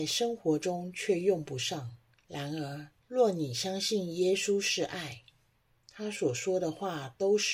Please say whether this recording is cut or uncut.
cut